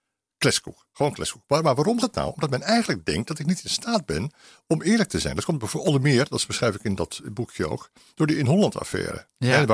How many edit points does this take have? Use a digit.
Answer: 1